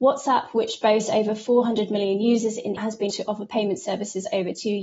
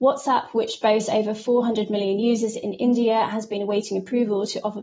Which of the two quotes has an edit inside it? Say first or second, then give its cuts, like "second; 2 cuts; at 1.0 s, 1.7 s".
first; 2 cuts; at 2.8 s, 3.1 s